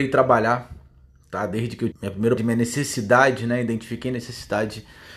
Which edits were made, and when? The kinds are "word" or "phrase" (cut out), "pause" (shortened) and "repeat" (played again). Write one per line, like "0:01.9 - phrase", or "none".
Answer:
0:01.9 - word
0:02.4 - word